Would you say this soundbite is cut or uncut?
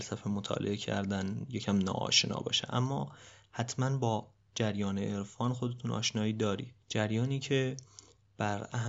cut